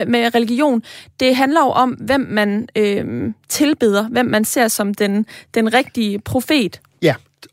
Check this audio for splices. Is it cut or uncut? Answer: uncut